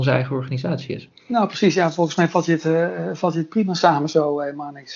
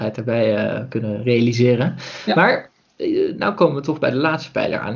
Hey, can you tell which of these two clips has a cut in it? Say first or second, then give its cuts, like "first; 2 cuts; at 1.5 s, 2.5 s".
first; 1 cut; at 1.2 s